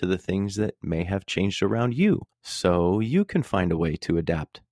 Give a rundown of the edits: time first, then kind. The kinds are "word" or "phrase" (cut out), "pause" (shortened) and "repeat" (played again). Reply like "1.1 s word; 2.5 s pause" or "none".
2.3 s pause